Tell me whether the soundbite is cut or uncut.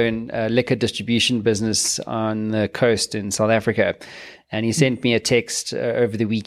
uncut